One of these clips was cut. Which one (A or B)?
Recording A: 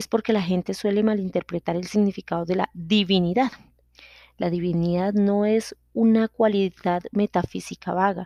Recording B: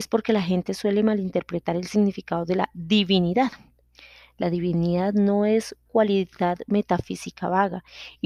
B